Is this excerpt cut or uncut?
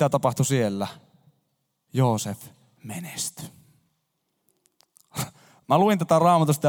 uncut